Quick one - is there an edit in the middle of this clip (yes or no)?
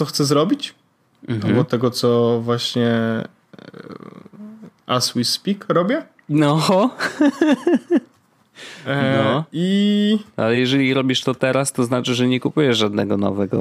no